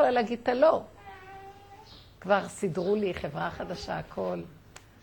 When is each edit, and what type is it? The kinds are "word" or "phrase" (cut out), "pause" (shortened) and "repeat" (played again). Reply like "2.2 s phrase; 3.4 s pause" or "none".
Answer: none